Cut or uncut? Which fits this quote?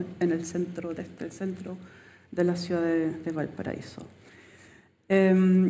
uncut